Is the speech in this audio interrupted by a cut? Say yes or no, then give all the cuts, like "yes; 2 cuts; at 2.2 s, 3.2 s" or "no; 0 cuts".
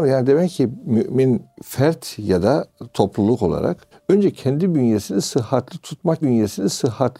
yes; 3 cuts; at 1.6 s, 3.9 s, 6.2 s